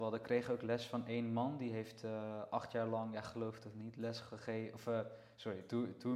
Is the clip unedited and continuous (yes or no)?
yes